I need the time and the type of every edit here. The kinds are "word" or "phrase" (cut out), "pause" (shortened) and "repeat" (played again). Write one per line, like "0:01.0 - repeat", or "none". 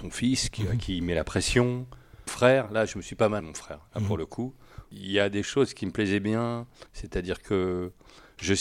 0:02.3 - word
0:03.4 - word
0:06.9 - pause